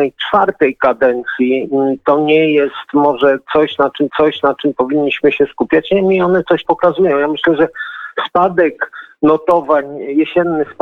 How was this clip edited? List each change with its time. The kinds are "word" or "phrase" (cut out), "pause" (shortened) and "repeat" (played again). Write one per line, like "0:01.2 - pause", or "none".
0:04.1 - repeat
0:06.6 - word